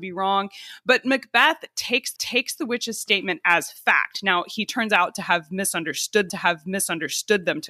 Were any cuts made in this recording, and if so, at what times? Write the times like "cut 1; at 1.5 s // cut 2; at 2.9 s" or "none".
cut 1; at 2.2 s // cut 2; at 6.3 s